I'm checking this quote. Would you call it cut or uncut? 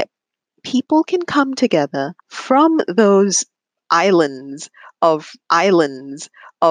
cut